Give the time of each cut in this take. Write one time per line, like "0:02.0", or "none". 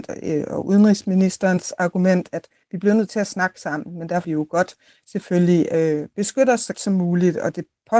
0:04.2
0:06.7